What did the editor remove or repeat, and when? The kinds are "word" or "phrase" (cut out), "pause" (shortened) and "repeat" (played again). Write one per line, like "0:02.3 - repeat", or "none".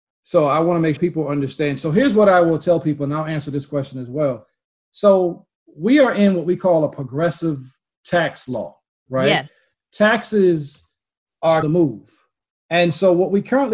0:01.0 - word
0:11.6 - phrase